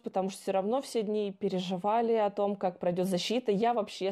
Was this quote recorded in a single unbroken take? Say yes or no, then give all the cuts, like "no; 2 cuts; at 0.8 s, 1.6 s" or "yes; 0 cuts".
yes; 0 cuts